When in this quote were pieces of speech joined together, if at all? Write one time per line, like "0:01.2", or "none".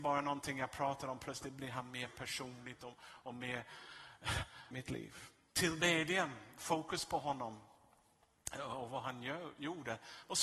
0:04.7